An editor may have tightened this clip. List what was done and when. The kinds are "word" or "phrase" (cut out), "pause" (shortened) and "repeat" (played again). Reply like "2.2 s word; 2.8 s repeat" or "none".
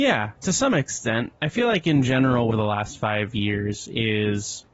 2.5 s phrase